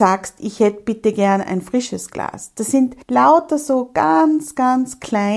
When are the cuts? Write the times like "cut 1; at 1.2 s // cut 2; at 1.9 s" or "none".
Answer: cut 1; at 3.0 s